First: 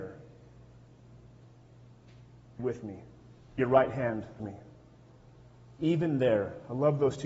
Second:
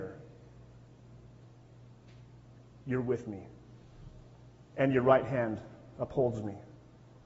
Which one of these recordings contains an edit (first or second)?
first